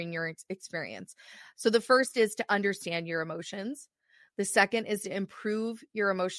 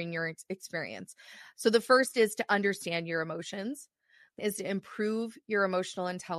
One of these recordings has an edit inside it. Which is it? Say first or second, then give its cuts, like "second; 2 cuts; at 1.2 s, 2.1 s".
second; 1 cut; at 4.4 s